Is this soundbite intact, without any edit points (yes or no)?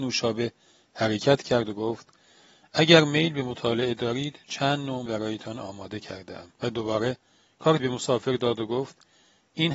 no